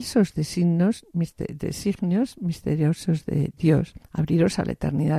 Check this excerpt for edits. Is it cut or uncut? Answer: cut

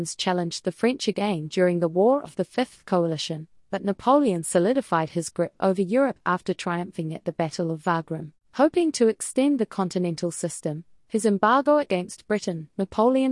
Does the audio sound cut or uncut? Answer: uncut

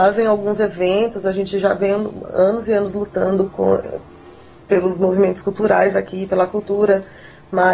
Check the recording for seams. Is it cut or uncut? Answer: uncut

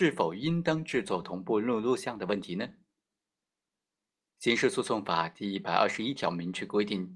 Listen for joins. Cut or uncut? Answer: uncut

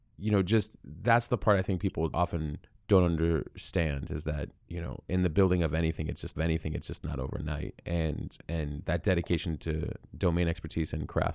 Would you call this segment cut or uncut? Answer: cut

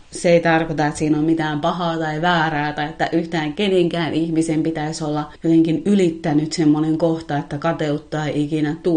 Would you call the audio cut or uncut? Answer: uncut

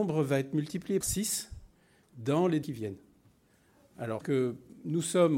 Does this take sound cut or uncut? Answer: cut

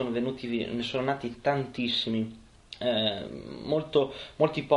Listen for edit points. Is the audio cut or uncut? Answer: cut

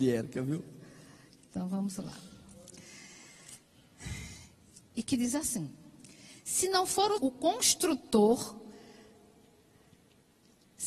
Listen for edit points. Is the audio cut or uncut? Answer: cut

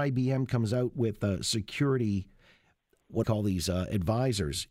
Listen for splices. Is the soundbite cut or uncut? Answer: cut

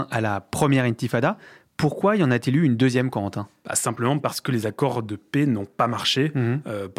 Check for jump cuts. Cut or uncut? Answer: uncut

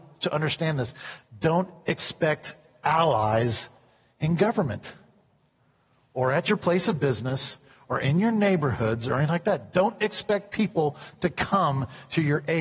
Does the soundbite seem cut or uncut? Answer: uncut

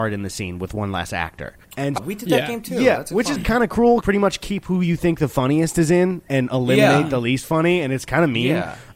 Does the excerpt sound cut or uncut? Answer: cut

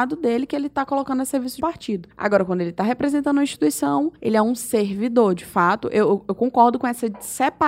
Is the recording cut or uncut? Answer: cut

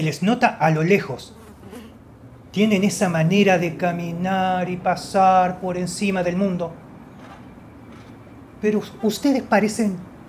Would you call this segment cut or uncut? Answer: uncut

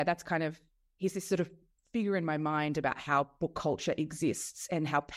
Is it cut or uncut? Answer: uncut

